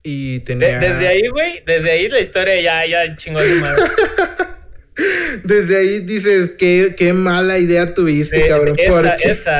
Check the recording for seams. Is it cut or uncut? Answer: uncut